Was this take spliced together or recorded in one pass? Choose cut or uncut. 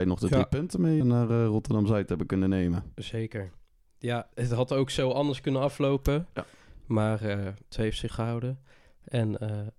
cut